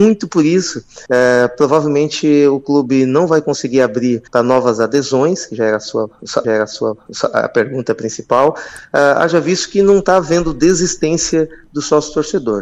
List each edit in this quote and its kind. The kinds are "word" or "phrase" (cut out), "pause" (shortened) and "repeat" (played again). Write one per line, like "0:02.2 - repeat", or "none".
0:01.1 - pause
0:04.3 - pause
0:06.4 - repeat